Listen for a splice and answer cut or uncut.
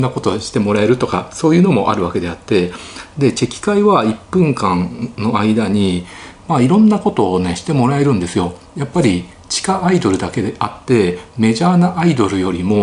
uncut